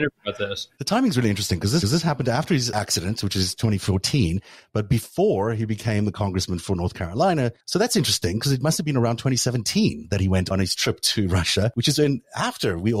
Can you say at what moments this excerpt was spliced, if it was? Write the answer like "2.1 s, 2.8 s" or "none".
1.8 s, 7.6 s